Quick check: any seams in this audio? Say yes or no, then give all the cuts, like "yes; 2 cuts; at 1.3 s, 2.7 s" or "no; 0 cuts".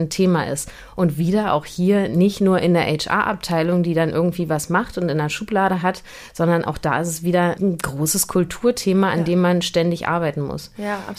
yes; 1 cut; at 7.6 s